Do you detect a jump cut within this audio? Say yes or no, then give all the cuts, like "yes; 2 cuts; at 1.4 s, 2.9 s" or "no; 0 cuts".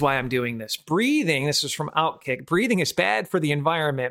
no; 0 cuts